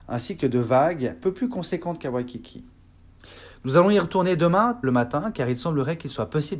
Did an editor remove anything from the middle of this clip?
yes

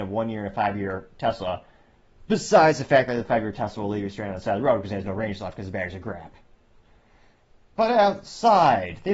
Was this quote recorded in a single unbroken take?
yes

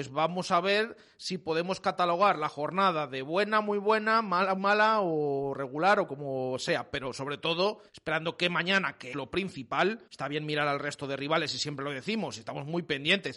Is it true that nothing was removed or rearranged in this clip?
no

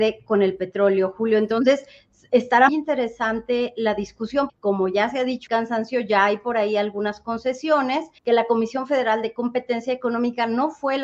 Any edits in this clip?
yes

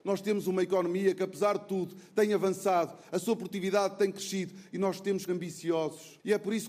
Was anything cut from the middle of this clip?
yes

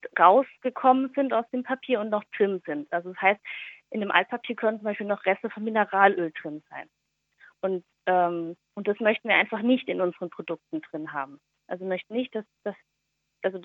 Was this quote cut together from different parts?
no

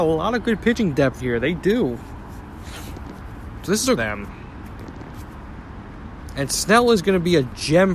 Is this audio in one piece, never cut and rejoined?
no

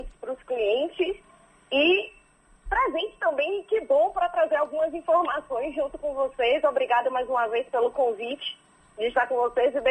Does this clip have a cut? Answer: no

